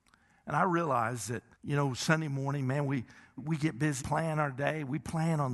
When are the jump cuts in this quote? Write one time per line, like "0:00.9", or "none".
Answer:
0:01.5
0:03.4
0:04.0